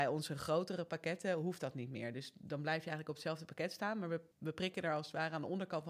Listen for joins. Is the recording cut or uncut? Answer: cut